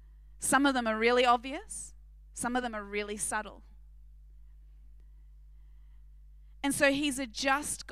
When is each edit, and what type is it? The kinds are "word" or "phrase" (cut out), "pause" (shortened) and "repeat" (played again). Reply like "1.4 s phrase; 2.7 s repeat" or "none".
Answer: none